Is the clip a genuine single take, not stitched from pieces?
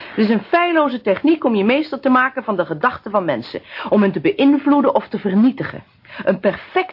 yes; 0 cuts

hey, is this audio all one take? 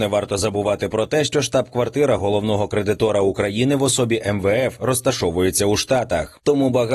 yes; 0 cuts

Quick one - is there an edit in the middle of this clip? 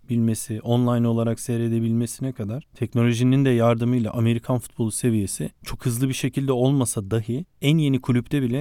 no; 0 cuts

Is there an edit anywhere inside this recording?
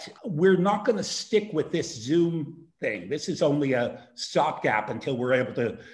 yes; 1 cut; at 2.7 s

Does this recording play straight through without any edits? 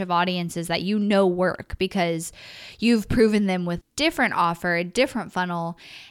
no; 1 cut; at 3.8 s

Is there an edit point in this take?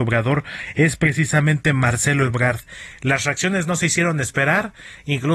no; 0 cuts

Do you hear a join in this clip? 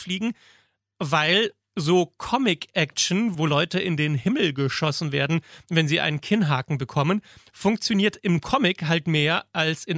no; 0 cuts

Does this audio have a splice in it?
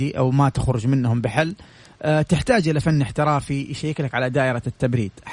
no; 0 cuts

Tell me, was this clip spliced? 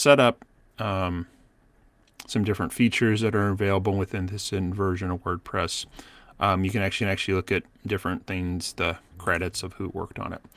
yes; 1 cut; at 7.0 s

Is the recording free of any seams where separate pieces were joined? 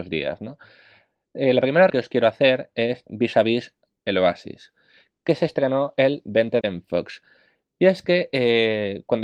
no; 3 cuts; at 1.9 s, 3.1 s, 6.6 s

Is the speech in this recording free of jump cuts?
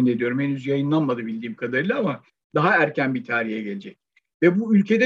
yes; 0 cuts

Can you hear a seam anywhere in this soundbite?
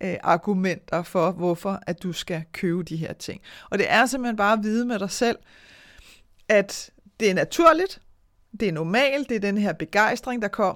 no; 0 cuts

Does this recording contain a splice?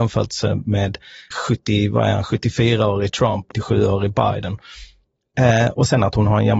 yes; 2 cuts; at 1.3 s, 3.5 s

